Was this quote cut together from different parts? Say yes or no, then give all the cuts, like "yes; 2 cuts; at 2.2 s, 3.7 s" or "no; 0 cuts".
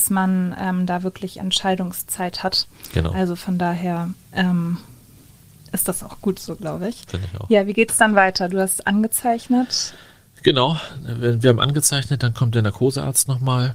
no; 0 cuts